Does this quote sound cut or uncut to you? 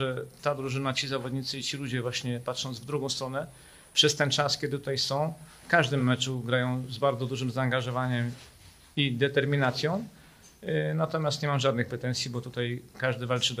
uncut